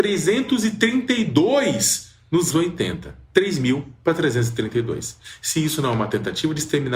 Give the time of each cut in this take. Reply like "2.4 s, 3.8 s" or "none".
2.5 s, 3.3 s